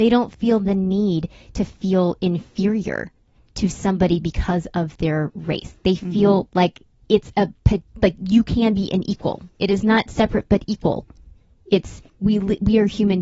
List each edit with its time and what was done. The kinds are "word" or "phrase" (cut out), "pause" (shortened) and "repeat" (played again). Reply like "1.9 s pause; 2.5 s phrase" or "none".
9.5 s pause; 12.1 s pause